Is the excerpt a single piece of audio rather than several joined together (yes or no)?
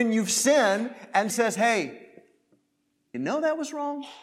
no